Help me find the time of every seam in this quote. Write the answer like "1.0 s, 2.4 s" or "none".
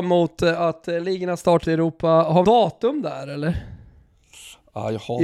1.6 s, 2.4 s

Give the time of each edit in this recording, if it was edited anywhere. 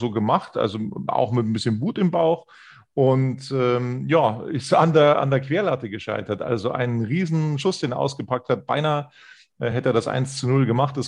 none

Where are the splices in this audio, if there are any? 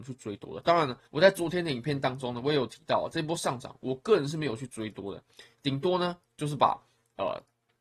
1.1 s, 6.2 s

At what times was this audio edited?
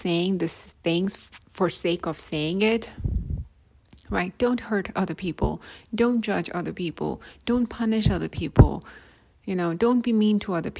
1.4 s

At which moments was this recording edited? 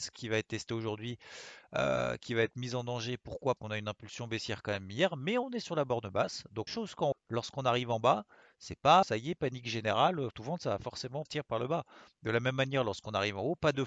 3.6 s, 6.7 s, 7.1 s, 9.0 s, 10.3 s, 11.3 s

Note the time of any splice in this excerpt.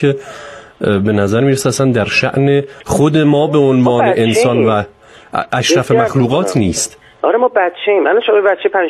2.8 s

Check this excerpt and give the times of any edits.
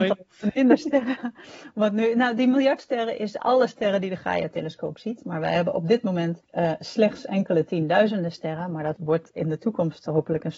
6.4 s

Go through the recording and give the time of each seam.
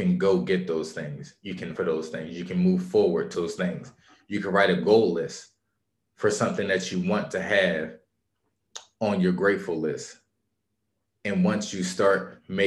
1.8 s, 3.3 s

